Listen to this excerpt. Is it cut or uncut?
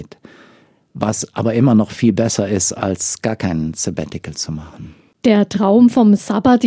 uncut